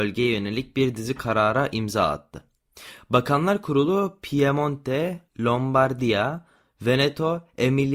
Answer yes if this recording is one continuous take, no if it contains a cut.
no